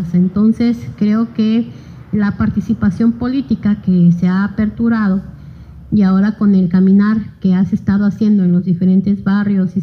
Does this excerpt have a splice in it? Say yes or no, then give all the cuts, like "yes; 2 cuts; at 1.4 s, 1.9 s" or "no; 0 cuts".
no; 0 cuts